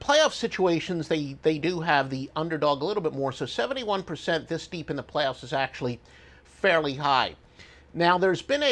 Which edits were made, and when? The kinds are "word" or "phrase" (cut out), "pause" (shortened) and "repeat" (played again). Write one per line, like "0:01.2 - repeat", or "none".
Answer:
none